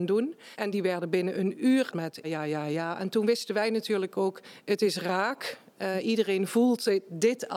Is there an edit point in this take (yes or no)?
yes